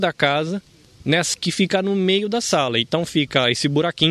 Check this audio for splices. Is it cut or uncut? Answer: cut